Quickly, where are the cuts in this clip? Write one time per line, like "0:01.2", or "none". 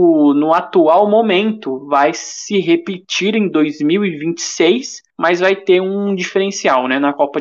0:05.1